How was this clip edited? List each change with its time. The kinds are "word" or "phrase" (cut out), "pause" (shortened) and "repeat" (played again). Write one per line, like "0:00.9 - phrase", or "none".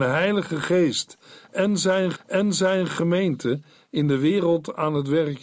0:02.1 - repeat